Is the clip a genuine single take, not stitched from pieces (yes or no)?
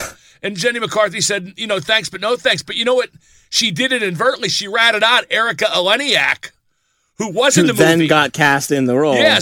yes